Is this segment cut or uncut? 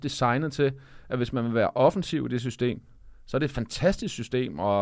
uncut